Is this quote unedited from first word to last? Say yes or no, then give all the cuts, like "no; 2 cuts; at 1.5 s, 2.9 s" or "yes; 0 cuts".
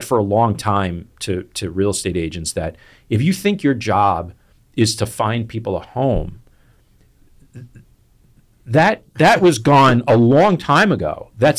yes; 0 cuts